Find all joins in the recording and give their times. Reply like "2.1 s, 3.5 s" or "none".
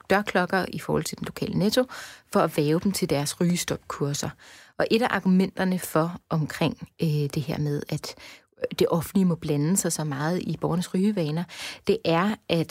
none